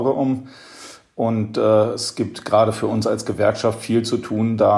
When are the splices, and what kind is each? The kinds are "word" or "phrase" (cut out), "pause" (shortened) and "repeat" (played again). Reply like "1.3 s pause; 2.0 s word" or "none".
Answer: none